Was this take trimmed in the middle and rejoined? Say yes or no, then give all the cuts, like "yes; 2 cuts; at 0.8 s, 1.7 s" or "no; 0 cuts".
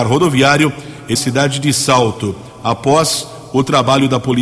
yes; 1 cut; at 1.2 s